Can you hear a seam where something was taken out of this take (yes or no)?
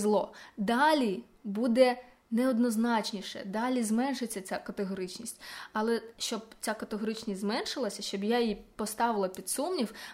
no